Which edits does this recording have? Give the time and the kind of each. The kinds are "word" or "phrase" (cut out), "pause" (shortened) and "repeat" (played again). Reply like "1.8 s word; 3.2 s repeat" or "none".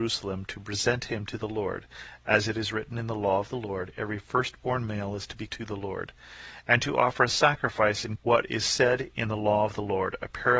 5.5 s word; 8.2 s word